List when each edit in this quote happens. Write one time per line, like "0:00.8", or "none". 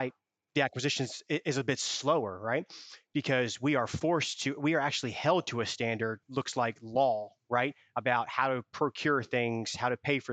0:06.2